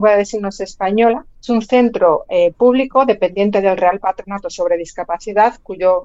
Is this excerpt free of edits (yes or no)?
no